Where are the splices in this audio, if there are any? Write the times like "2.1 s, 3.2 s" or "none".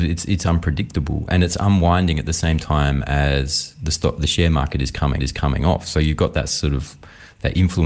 5.2 s